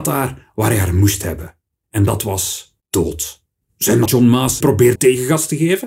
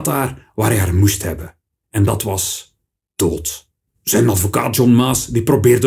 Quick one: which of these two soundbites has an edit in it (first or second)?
first